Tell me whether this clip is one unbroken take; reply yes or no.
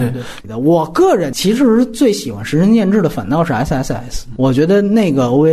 yes